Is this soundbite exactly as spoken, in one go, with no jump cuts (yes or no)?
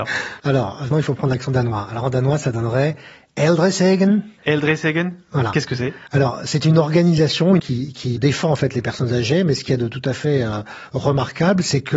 no